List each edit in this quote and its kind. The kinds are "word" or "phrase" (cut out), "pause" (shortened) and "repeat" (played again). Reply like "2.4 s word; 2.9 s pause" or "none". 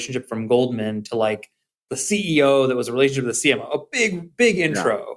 none